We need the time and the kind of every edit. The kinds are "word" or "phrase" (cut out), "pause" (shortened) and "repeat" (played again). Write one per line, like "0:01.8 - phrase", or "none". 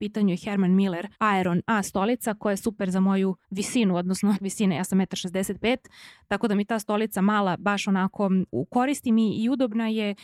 0:01.1 - pause
0:03.4 - pause
0:04.4 - word